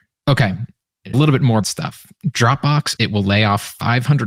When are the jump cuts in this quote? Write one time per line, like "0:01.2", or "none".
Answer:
0:01.1
0:01.6
0:03.0